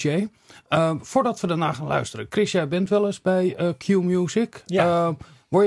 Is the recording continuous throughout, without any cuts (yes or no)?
yes